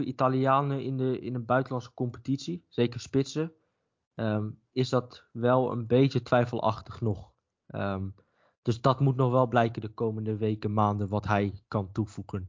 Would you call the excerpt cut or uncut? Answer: uncut